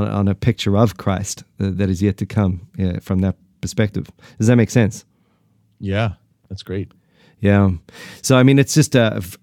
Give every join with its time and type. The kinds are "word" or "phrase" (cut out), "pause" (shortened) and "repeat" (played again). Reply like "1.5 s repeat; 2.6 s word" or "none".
none